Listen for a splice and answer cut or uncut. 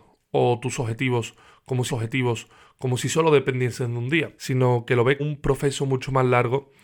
cut